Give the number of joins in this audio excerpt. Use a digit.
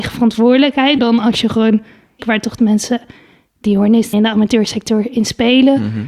4